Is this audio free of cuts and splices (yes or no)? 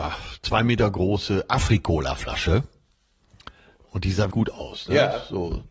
no